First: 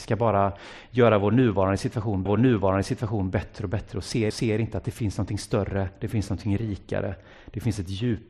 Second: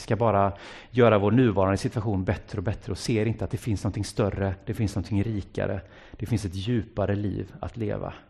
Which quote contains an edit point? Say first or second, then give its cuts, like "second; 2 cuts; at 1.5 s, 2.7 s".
first; 2 cuts; at 2.3 s, 4.3 s